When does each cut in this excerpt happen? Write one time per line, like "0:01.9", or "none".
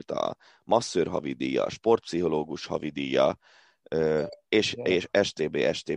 none

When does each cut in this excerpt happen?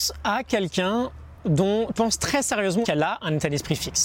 0:01.9
0:02.8

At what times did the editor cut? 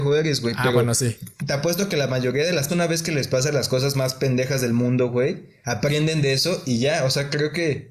0:01.4
0:02.7

